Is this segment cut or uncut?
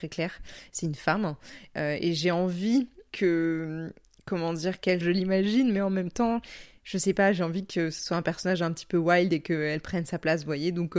cut